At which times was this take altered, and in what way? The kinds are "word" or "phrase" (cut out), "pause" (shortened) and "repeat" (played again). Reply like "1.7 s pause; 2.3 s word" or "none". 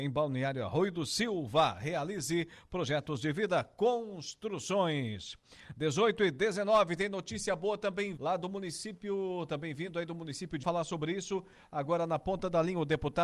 8.2 s word; 10.6 s phrase